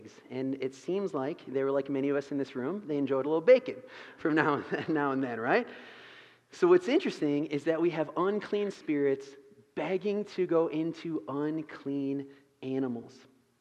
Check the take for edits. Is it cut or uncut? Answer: uncut